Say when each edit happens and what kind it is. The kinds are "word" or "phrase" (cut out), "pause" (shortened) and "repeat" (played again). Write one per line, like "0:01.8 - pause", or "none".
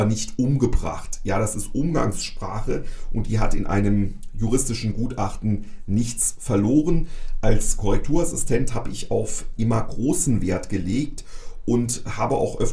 0:09.6 - phrase